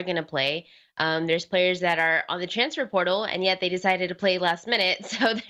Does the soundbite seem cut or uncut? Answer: uncut